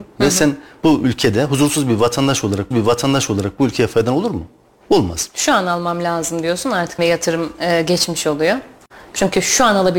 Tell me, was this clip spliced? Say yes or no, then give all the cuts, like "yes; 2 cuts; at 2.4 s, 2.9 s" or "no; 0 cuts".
yes; 2 cuts; at 2.7 s, 7.0 s